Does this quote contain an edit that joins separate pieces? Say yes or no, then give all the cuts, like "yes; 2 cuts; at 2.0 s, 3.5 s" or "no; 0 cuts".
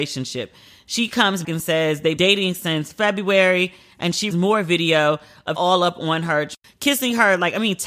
yes; 4 cuts; at 1.4 s, 2.2 s, 4.3 s, 5.6 s